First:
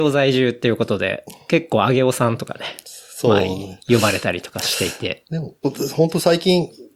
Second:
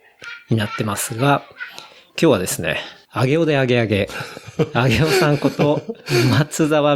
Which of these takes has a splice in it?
first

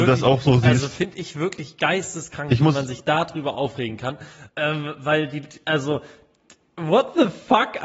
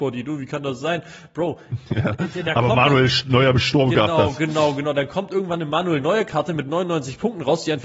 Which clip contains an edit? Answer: first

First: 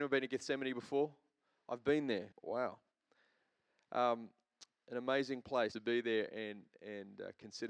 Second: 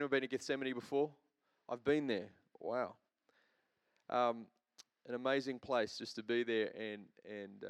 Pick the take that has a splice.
first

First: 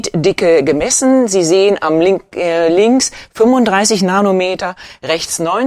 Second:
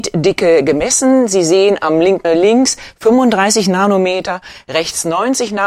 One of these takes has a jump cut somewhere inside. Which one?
second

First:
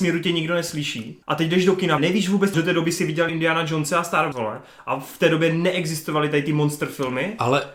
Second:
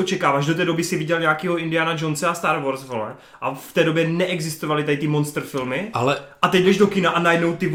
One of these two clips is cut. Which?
first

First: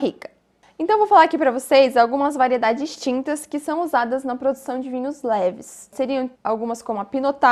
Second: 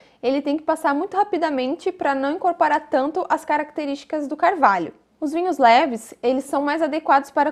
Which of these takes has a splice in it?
first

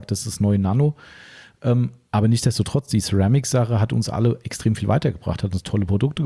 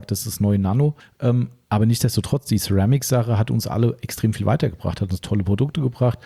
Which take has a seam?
second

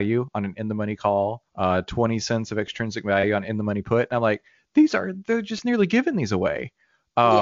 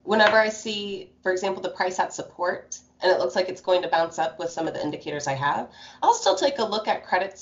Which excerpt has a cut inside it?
first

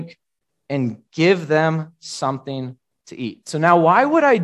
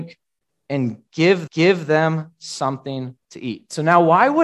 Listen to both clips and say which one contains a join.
second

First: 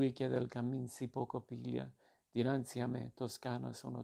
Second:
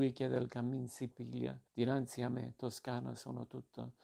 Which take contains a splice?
second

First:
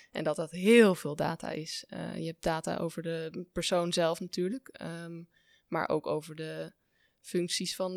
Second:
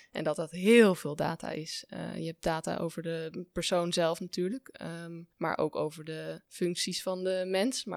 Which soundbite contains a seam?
second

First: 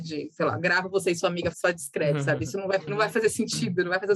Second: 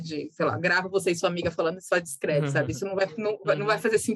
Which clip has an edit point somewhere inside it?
first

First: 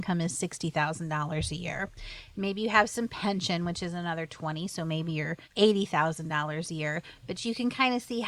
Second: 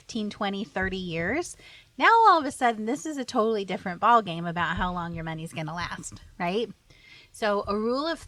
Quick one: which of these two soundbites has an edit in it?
first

